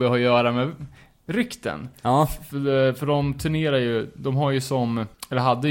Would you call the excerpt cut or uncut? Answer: uncut